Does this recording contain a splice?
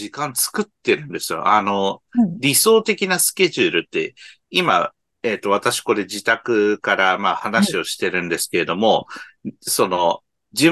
no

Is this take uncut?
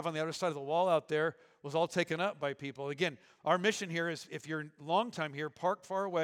yes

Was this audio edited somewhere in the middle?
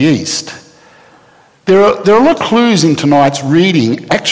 yes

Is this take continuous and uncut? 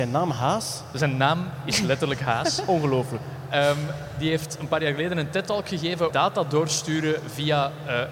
no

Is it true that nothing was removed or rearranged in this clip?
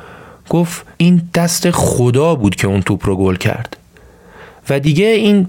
no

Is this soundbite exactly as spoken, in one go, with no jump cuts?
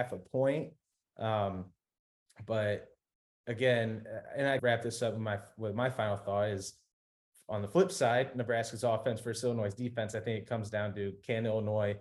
no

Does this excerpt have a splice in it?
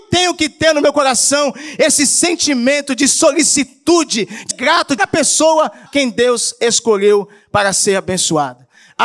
yes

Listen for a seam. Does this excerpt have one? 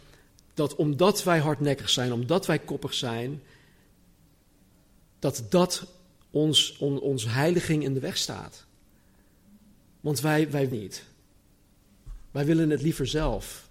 yes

